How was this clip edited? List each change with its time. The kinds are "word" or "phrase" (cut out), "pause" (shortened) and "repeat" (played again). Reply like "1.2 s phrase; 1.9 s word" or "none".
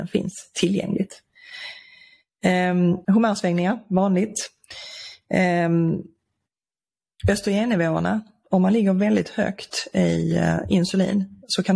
3.0 s pause